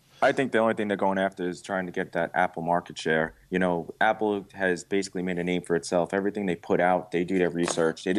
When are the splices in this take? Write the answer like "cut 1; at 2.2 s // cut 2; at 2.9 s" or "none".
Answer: cut 1; at 3.4 s